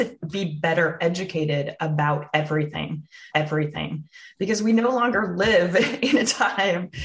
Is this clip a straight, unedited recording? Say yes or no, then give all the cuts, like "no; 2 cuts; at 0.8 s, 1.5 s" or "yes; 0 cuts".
no; 1 cut; at 3.3 s